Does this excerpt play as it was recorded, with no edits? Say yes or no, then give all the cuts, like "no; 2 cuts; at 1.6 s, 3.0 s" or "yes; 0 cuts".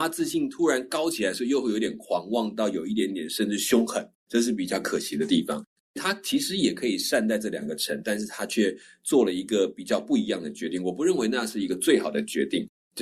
no; 1 cut; at 4.1 s